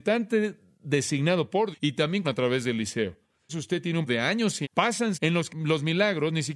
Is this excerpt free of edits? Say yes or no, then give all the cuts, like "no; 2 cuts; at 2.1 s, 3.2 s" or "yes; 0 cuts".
no; 7 cuts; at 1.7 s, 2.2 s, 3.5 s, 4.1 s, 4.6 s, 5.1 s, 5.5 s